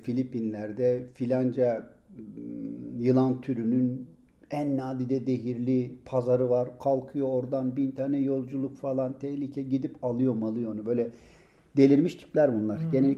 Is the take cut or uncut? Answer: uncut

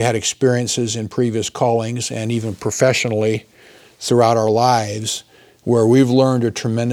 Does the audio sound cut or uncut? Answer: uncut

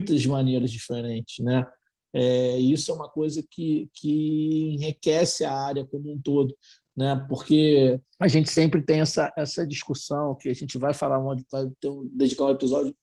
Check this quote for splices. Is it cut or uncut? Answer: uncut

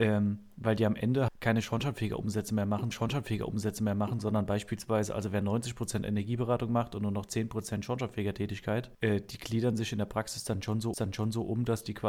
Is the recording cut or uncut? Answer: cut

